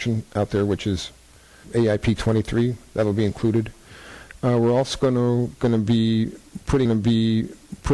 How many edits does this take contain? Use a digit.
2